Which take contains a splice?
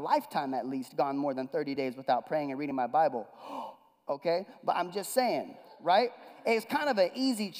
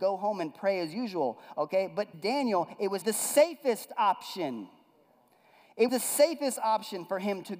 second; 3 cuts; at 2.1 s, 3.0 s, 5.9 s

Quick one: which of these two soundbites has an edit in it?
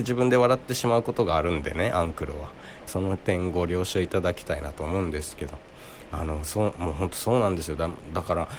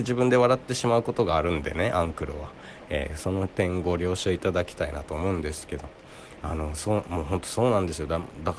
first; 1 cut; at 2.9 s

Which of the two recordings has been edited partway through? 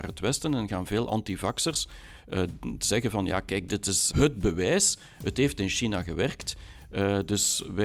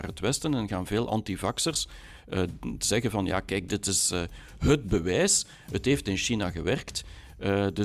first; 1 cut; at 4.1 s

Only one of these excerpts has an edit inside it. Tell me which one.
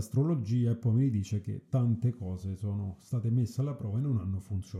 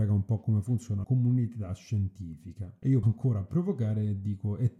second; 2 cuts; at 1.0 s, 3.0 s

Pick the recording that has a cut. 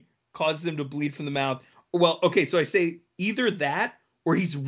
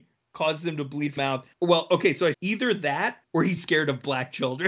second; 5 cuts; at 1.2 s, 1.5 s, 2.3 s, 3.2 s, 3.6 s

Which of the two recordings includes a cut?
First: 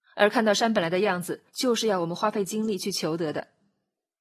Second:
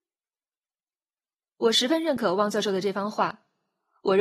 first; 1 cut; at 1.5 s

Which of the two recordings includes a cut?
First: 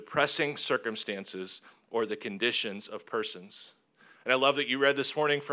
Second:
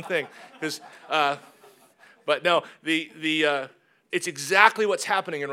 second; 1 cut; at 4.1 s

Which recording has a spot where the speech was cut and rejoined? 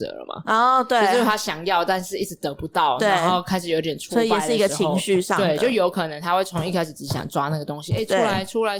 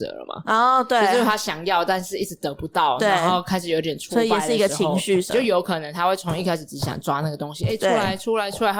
second; 1 cut; at 5.3 s

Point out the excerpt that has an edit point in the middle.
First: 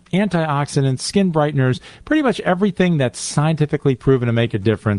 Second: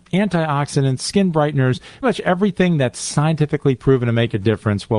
second; 1 cut; at 2.0 s

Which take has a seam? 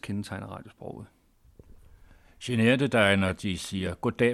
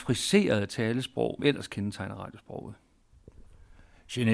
second; 1 cut; at 1.4 s

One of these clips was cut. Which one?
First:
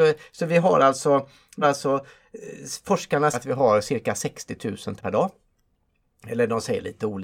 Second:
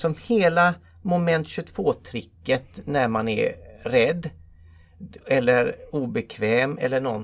first; 3 cuts; at 1.6 s, 3.3 s, 5.0 s

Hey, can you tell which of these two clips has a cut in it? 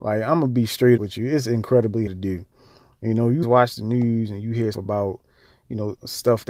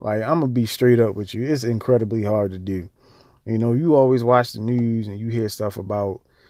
first; 4 cuts; at 1.0 s, 2.1 s, 3.4 s, 4.7 s

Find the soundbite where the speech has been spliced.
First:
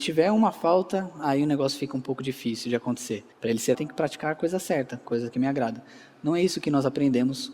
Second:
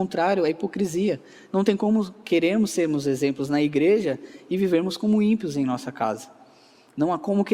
first; 2 cuts; at 3.3 s, 3.7 s

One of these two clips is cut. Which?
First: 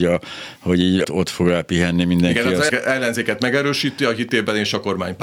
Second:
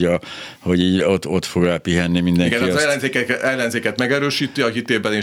first; 2 cuts; at 1.0 s, 2.7 s

